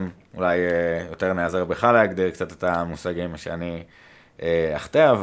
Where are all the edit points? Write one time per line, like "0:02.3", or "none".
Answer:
none